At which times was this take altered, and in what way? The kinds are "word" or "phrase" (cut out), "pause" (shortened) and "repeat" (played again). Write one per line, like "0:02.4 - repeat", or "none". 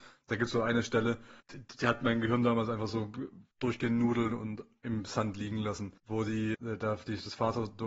0:01.4 - pause
0:03.5 - pause
0:06.0 - pause
0:06.5 - word